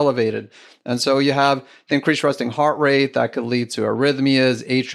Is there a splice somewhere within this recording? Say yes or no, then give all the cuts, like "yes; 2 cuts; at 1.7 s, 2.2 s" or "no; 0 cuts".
no; 0 cuts